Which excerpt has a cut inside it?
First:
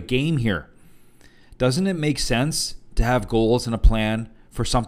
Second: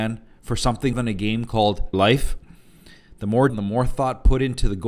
second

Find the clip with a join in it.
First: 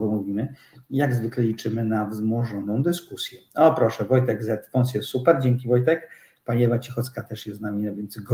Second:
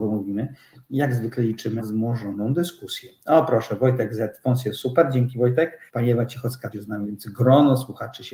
second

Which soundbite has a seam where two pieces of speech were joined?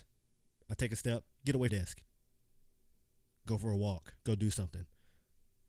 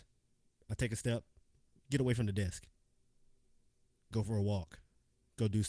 first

